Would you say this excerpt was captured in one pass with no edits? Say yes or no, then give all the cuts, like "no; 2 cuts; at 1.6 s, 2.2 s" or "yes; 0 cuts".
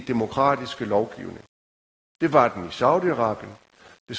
yes; 0 cuts